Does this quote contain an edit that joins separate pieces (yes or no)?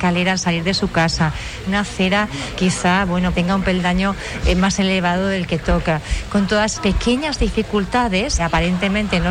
yes